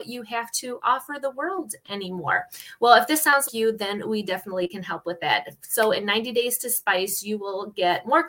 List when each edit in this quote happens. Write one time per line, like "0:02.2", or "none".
0:03.5